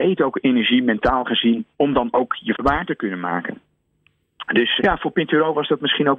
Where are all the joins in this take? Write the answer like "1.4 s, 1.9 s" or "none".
1.7 s, 2.5 s, 4.8 s